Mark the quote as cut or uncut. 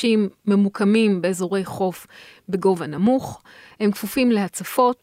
uncut